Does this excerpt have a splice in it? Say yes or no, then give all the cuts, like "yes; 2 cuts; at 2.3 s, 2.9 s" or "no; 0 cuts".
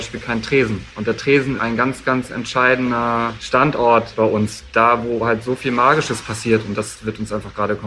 yes; 1 cut; at 1.6 s